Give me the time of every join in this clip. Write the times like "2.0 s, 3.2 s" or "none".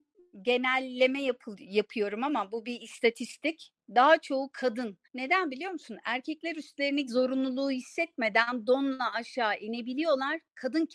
5.1 s, 7.1 s